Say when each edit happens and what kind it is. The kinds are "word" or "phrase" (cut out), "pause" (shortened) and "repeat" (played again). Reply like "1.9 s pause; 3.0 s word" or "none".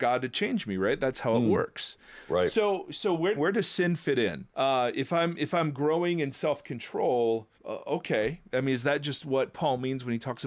3.4 s phrase; 4.5 s pause; 7.5 s pause